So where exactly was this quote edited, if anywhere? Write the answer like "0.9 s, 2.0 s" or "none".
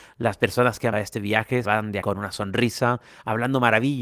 0.9 s, 1.6 s, 2.0 s